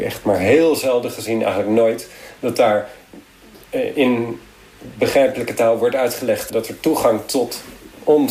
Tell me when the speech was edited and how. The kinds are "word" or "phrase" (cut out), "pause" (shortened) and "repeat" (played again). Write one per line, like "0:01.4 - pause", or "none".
none